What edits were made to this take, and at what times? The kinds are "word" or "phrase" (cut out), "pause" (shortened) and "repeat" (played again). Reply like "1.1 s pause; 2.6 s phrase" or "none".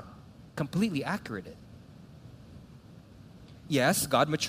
1.4 s word